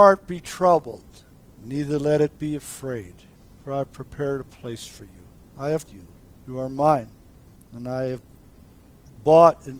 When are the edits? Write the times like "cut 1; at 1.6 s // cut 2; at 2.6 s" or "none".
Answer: cut 1; at 5.9 s